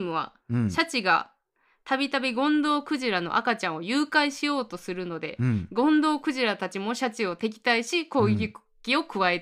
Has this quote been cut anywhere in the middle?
no; 0 cuts

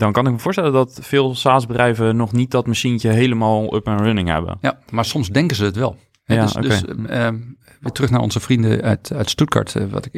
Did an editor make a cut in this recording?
no; 0 cuts

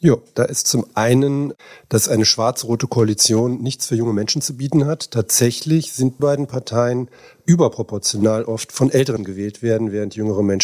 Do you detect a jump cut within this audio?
yes; 2 cuts; at 6.2 s, 9.2 s

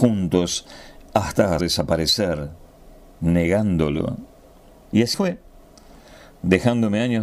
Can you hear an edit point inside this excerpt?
yes; 2 cuts; at 1.6 s, 5.1 s

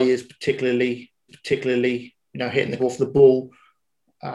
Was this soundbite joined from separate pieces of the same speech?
yes; 2 cuts; at 1.3 s, 2.8 s

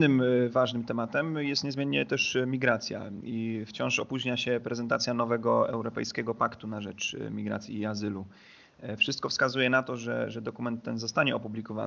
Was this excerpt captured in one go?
yes; 0 cuts

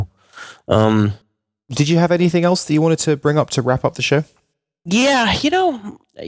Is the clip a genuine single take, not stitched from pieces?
yes; 0 cuts

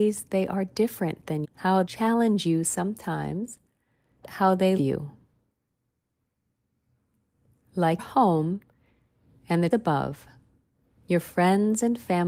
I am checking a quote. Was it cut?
yes; 6 cuts; at 1.4 s, 1.9 s, 4.2 s, 4.8 s, 8.0 s, 9.7 s

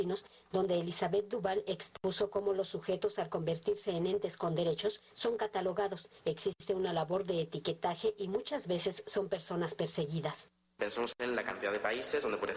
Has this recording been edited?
no; 0 cuts

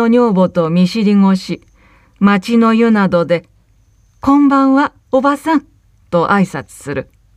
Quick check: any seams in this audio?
no; 0 cuts

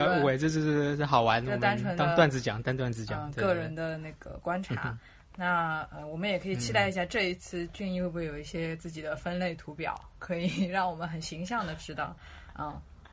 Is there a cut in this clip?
no; 0 cuts

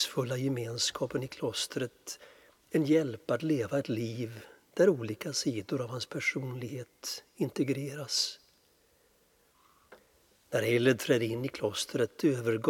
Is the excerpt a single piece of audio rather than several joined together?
yes; 0 cuts

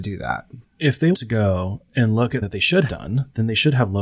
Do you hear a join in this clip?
yes; 3 cuts; at 1.1 s, 2.4 s, 2.9 s

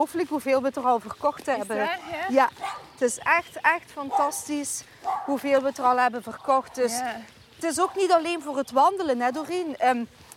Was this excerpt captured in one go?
yes; 0 cuts

